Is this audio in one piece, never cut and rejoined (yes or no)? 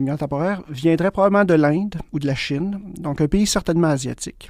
yes